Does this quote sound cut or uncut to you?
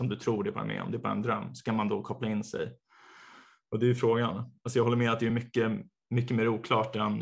uncut